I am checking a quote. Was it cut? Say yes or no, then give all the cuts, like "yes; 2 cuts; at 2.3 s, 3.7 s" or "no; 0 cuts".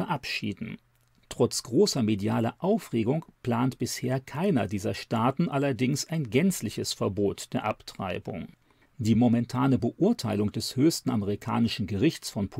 no; 0 cuts